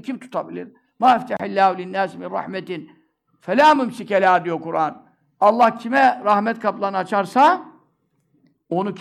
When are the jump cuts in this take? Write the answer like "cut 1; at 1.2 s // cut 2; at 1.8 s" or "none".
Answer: none